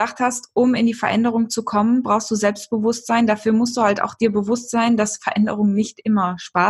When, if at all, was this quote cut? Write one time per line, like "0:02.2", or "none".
none